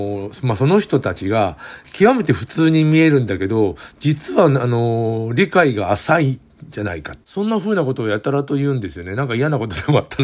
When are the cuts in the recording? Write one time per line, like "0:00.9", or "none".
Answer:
0:07.2